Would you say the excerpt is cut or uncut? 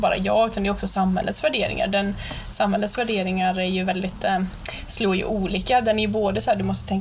uncut